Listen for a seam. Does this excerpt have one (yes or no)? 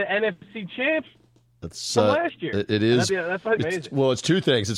yes